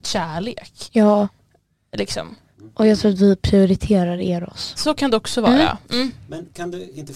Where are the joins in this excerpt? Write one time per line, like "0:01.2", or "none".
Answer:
none